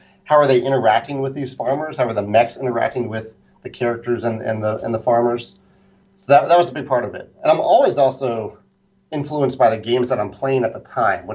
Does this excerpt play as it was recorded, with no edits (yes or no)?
yes